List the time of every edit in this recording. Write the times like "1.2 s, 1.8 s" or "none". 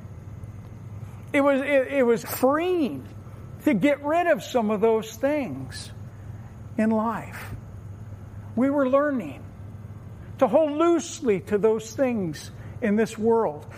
2.2 s